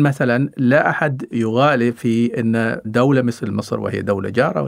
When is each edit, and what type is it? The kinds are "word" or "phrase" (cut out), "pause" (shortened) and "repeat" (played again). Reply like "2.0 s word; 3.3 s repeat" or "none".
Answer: none